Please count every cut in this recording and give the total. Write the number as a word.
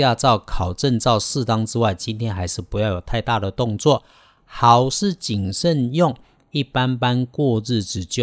zero